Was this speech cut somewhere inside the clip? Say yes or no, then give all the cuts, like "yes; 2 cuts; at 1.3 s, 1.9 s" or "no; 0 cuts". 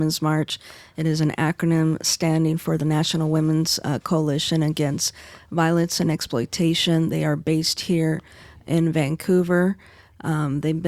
no; 0 cuts